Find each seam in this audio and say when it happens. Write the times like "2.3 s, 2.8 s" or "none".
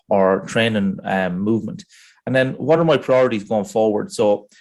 none